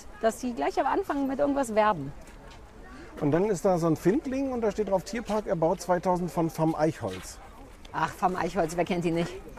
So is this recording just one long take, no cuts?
no; 1 cut; at 7.9 s

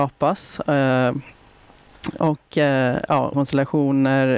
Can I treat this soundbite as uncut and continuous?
no; 1 cut; at 3.3 s

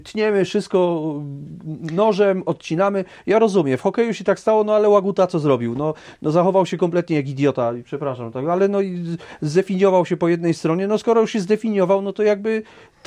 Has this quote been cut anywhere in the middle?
no; 0 cuts

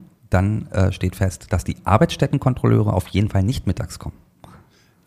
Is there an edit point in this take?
no; 0 cuts

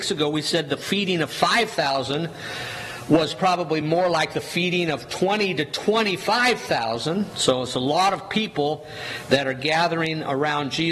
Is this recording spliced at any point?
no; 0 cuts

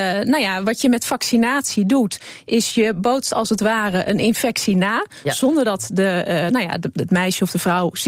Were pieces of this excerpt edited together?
no; 0 cuts

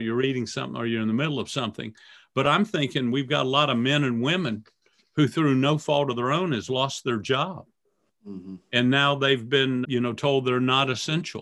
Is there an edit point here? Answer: yes; 1 cut; at 9.8 s

